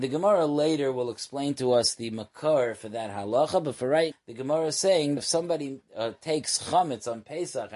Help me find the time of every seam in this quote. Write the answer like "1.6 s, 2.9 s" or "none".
4.1 s, 5.2 s, 5.9 s